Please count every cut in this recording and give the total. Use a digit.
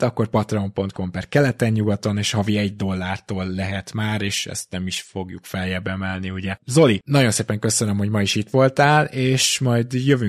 0